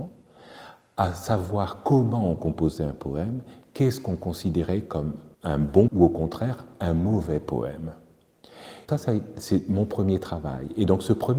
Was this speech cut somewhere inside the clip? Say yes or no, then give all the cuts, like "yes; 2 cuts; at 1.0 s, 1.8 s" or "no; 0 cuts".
yes; 3 cuts; at 5.3 s, 5.9 s, 8.9 s